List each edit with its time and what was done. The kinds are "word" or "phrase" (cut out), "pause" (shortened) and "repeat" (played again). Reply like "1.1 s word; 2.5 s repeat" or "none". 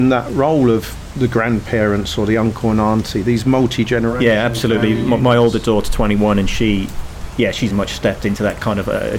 5.8 s word; 7.7 s word